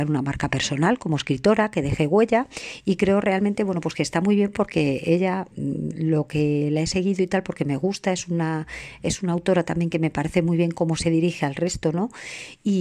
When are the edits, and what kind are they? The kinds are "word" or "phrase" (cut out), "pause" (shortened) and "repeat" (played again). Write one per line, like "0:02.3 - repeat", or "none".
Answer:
none

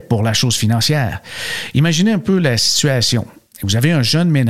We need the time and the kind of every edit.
none

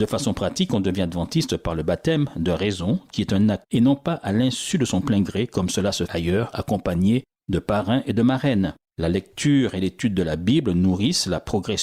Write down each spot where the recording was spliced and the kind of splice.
0:03.6 - phrase
0:06.1 - word

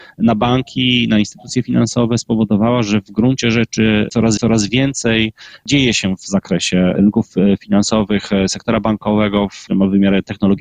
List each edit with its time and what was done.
0:04.4 - repeat

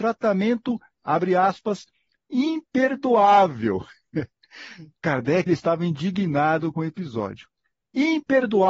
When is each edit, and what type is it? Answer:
0:05.5 - word

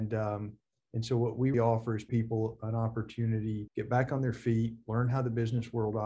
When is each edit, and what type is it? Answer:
0:01.5 - word
0:02.1 - word
0:03.7 - word

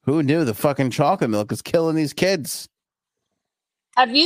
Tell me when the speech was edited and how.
none

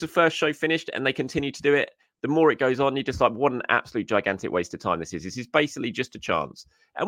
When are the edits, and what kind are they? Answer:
none

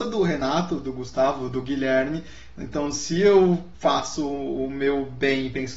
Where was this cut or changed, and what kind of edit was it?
0:03.7 - pause

